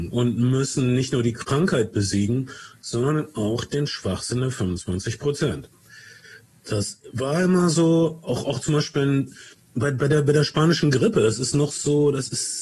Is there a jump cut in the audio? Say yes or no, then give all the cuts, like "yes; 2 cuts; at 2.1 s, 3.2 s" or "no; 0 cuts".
no; 0 cuts